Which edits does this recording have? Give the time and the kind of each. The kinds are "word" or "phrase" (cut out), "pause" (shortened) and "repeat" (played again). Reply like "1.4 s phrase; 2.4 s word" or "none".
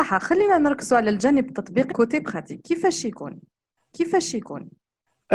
1.9 s phrase; 3.9 s repeat